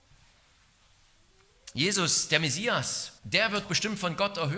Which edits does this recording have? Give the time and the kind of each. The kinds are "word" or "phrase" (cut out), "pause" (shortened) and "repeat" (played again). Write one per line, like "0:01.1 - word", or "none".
0:03.2 - pause
0:03.6 - word